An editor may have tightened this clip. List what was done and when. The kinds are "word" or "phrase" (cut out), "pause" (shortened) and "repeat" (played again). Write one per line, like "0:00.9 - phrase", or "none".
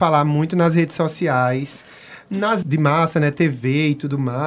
0:02.6 - word